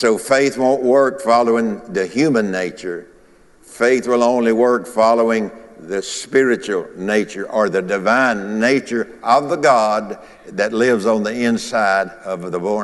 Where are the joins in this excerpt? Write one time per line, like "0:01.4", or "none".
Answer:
none